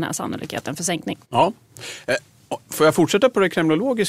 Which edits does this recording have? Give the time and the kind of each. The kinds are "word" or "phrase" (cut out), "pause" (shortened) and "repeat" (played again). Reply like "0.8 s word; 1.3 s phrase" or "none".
1.2 s pause